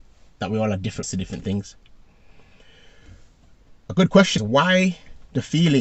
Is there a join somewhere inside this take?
yes; 2 cuts; at 1.0 s, 4.4 s

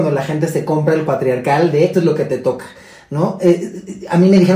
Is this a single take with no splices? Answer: no; 2 cuts; at 1.1 s, 1.9 s

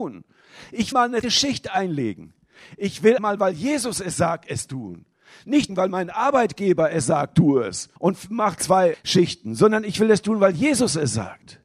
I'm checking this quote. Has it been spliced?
yes; 7 cuts; at 0.9 s, 1.2 s, 3.2 s, 5.7 s, 8.0 s, 8.6 s, 8.9 s

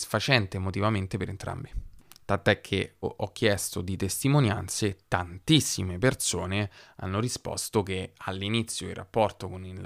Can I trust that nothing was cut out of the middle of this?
no; 1 cut; at 3.0 s

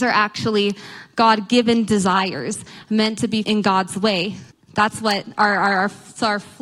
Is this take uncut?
no; 2 cuts; at 3.4 s, 4.5 s

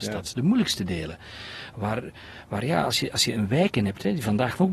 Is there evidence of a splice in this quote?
no; 0 cuts

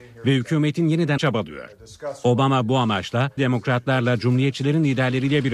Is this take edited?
yes; 2 cuts; at 1.2 s, 3.4 s

